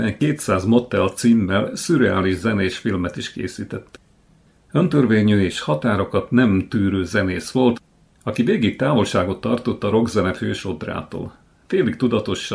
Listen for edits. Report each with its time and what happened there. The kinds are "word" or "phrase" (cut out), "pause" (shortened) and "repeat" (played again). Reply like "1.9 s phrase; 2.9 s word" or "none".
none